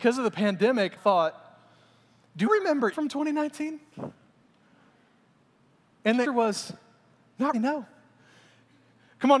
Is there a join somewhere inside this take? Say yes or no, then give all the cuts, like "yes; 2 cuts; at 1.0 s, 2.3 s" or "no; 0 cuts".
yes; 5 cuts; at 1.0 s, 2.5 s, 2.9 s, 6.2 s, 7.5 s